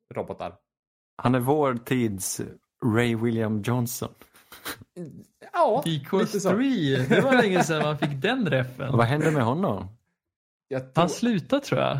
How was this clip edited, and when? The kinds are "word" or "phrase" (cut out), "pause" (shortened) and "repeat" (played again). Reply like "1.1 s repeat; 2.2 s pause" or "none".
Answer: none